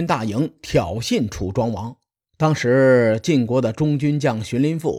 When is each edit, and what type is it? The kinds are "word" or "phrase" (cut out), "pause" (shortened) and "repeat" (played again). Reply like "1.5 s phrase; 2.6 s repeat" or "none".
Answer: 2.2 s pause